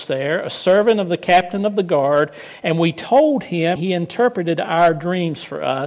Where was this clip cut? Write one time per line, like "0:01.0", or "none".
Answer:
0:03.8